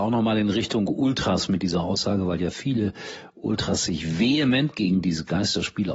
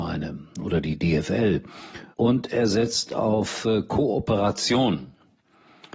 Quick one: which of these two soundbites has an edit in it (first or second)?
second